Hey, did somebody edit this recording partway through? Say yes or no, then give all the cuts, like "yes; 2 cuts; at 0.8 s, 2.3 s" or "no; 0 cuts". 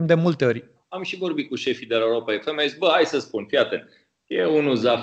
no; 0 cuts